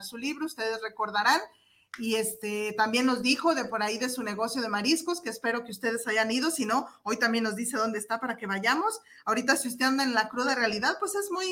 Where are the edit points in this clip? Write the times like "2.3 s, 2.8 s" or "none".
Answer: none